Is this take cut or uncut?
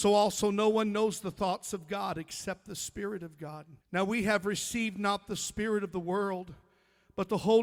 cut